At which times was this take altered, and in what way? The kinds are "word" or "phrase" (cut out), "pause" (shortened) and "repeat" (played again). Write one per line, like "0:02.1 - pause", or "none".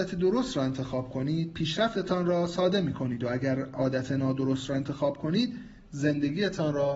none